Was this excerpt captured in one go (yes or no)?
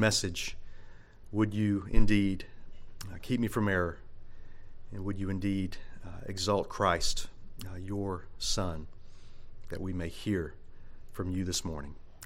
yes